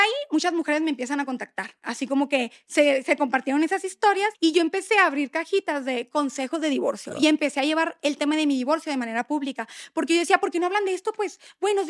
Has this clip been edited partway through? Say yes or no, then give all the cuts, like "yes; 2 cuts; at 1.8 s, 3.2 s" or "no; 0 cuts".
yes; 1 cut; at 4.3 s